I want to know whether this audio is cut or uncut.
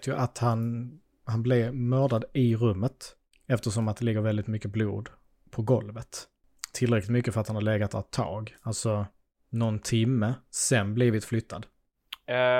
uncut